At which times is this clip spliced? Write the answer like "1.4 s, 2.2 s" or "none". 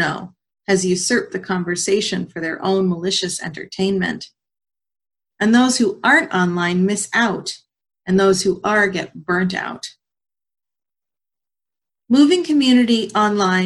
none